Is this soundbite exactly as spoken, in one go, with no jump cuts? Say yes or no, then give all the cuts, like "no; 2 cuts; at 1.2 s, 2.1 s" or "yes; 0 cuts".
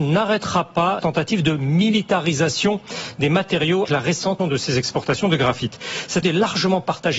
no; 4 cuts; at 1.0 s, 3.8 s, 4.4 s, 6.2 s